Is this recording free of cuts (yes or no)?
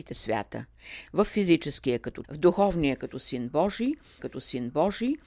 no